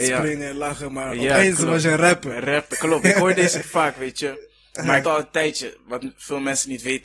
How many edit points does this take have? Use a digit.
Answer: 3